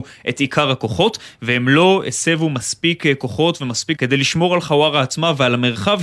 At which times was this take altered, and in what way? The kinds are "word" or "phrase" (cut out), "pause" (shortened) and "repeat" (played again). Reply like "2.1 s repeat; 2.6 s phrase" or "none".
4.0 s word